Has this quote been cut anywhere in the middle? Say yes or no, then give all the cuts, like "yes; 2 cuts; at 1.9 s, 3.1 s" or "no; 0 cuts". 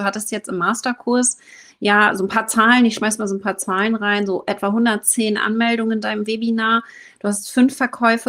no; 0 cuts